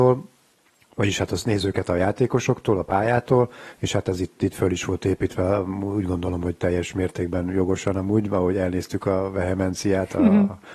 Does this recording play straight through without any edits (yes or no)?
no